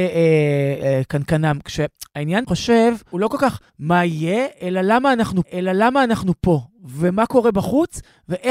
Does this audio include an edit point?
yes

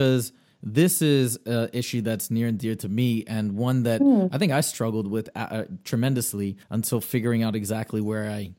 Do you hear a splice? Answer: yes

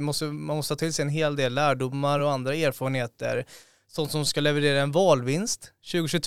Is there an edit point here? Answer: no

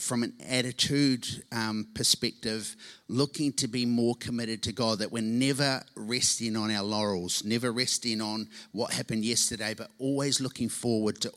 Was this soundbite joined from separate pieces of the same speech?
no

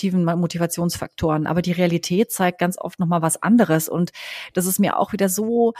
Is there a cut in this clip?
no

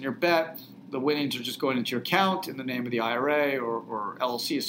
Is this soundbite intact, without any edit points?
yes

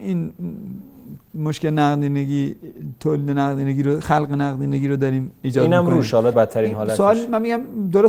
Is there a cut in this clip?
yes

